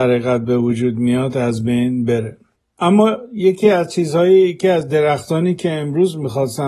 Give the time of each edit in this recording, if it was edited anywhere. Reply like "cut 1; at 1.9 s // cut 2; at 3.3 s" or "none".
none

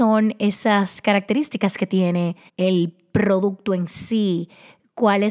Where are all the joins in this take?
cut 1; at 2.5 s

